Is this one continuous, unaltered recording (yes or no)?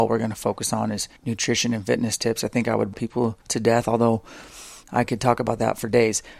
no